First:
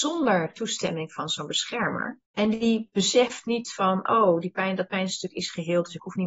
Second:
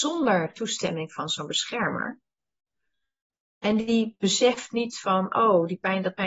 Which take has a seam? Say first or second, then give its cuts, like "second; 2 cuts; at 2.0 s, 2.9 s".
first; 1 cut; at 2.2 s